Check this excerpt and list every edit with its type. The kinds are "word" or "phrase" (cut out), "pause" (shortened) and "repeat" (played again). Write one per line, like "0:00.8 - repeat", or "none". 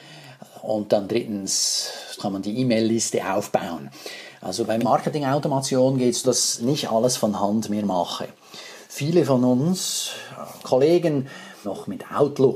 0:02.2 - word
0:04.8 - word
0:06.2 - word
0:06.6 - word
0:10.6 - word
0:11.6 - phrase